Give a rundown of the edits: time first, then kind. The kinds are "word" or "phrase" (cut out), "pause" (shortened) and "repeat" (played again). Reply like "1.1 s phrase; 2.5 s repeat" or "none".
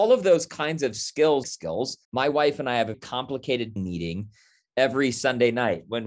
1.4 s phrase; 2.0 s pause; 2.9 s word; 3.8 s word

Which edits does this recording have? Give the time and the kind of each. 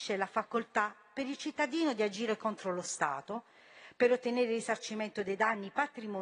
none

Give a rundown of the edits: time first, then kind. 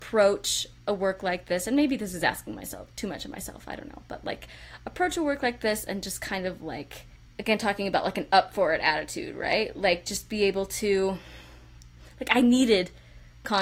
7.2 s pause

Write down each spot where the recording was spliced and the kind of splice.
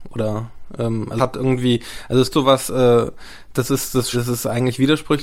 1.2 s word; 2.3 s word; 3.5 s word; 4.1 s word

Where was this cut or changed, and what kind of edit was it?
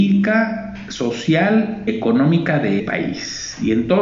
1.9 s word; 2.8 s word

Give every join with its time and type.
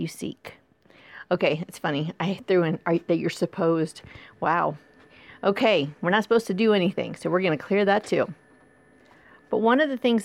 none

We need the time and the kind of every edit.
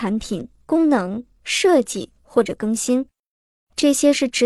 none

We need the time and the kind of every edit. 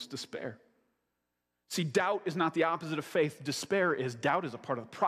none

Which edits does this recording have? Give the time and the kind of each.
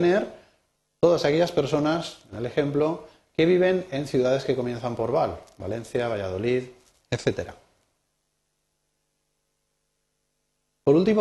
none

